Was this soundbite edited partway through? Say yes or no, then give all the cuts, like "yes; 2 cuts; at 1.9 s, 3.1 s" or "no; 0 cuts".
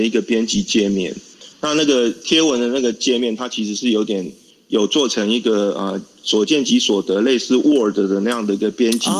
no; 0 cuts